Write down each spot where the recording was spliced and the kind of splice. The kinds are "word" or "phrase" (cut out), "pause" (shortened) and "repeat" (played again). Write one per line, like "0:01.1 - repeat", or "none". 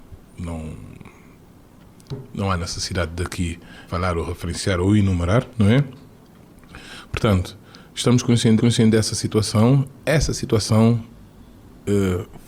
0:03.9 - word
0:05.5 - pause
0:08.6 - repeat
0:10.0 - word